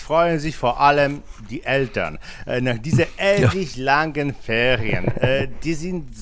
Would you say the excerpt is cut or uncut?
uncut